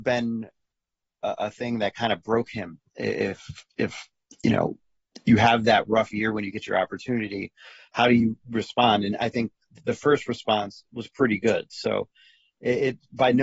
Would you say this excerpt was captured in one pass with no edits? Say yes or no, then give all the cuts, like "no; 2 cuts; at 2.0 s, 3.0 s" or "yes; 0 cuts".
yes; 0 cuts